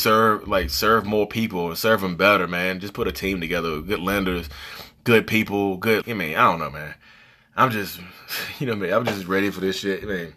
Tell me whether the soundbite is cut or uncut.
cut